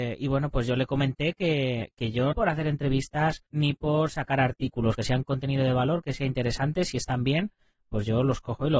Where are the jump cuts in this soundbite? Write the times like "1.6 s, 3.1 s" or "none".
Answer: 2.3 s, 3.5 s, 5.0 s